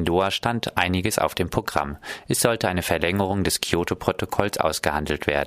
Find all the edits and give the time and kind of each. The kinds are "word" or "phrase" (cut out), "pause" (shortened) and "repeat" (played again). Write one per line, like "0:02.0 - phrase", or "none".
none